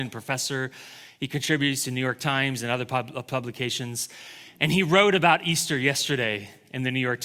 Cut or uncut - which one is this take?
uncut